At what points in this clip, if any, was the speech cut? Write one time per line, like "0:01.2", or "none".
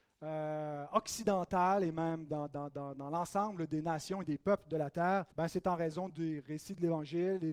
0:05.3